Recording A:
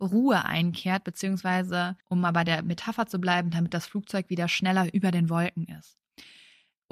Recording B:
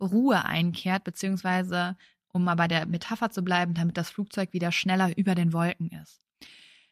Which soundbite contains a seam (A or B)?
A